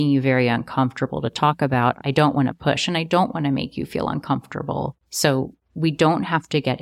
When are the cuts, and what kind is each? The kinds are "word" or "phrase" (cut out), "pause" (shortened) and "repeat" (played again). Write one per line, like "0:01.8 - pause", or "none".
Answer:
0:05.0 - pause